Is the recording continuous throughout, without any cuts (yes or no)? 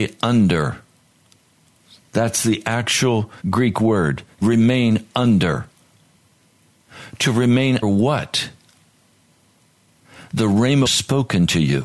no